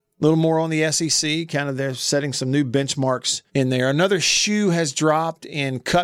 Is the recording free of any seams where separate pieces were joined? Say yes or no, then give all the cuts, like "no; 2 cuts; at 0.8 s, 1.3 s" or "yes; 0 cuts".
no; 1 cut; at 3.5 s